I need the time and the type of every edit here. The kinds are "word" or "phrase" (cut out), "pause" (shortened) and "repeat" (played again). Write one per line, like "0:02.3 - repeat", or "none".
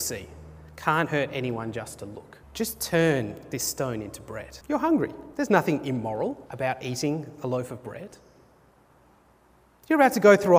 0:02.4 - pause
0:04.6 - pause
0:05.3 - pause
0:06.5 - pause